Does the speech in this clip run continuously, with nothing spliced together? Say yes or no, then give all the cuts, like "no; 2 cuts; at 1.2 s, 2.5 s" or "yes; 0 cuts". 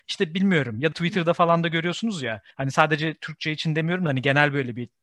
no; 2 cuts; at 0.9 s, 2.5 s